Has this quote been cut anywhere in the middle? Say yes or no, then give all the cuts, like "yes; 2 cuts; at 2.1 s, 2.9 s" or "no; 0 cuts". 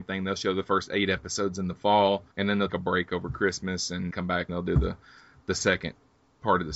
yes; 4 cuts; at 2.3 s, 2.7 s, 4.1 s, 4.5 s